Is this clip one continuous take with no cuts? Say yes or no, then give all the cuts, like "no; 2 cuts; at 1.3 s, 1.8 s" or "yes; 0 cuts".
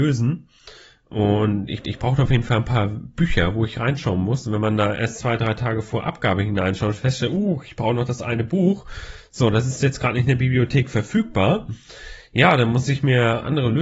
no; 1 cut; at 1.8 s